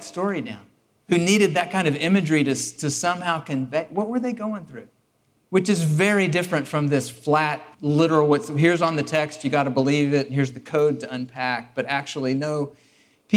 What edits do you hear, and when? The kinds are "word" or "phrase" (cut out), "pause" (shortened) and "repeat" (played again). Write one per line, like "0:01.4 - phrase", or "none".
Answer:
0:05.0 - pause
0:07.7 - pause